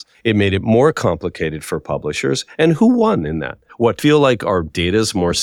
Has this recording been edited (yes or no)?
yes